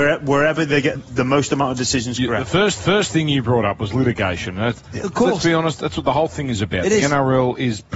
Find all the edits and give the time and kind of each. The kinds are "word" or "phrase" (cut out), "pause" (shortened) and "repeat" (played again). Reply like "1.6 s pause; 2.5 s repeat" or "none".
1.0 s word; 2.8 s repeat